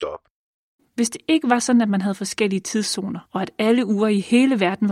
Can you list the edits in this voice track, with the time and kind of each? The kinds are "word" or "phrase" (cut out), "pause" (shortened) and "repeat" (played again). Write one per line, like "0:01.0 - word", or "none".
0:03.3 - pause